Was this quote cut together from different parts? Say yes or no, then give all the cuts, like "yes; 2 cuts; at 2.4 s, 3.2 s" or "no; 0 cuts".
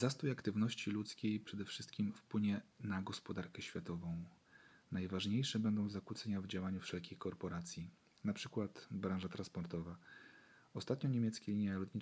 no; 0 cuts